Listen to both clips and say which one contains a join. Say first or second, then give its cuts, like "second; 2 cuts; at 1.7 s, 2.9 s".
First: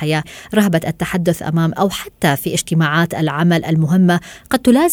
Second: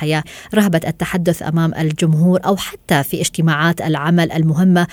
first; 1 cut; at 1.7 s